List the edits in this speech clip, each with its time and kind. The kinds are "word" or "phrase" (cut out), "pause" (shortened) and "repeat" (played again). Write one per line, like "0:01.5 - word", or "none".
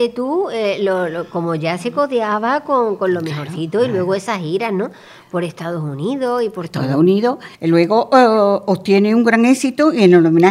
0:07.5 - pause